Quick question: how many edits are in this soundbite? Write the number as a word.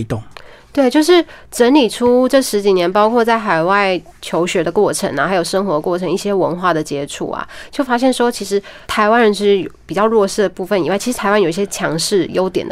one